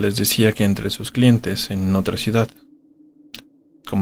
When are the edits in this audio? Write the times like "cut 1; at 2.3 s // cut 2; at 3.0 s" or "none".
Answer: none